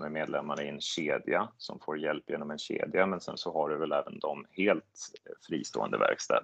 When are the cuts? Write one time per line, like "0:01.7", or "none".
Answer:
none